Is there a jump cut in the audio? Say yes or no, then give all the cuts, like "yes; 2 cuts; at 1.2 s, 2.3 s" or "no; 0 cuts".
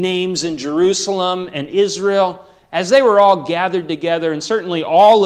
no; 0 cuts